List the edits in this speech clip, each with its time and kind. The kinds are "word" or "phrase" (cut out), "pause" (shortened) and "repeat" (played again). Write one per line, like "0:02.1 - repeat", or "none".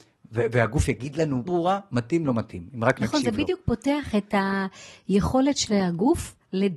0:01.5 - phrase